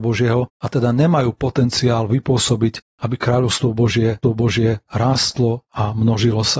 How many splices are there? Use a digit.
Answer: 1